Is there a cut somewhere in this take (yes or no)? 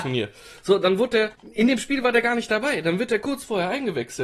yes